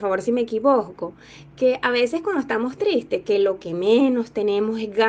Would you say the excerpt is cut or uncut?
uncut